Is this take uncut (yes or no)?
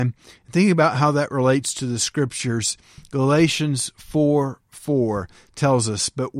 yes